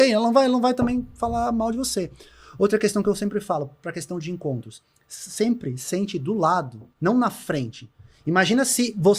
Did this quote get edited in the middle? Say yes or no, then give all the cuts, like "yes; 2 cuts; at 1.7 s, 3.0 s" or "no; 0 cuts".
yes; 1 cut; at 6.9 s